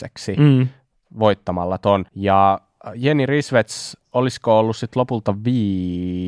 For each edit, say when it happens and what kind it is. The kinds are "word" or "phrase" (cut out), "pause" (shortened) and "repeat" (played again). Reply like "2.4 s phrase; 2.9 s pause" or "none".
2.1 s pause